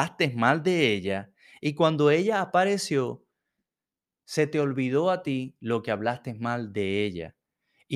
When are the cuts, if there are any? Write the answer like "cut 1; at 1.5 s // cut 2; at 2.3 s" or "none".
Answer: none